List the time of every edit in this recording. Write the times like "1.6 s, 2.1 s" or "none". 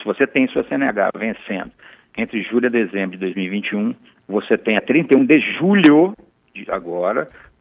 4.8 s